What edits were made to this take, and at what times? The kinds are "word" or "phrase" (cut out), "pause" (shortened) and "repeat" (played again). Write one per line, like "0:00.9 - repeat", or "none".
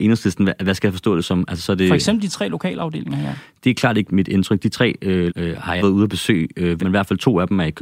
0:04.1 - word
0:05.3 - word
0:05.8 - word
0:06.8 - phrase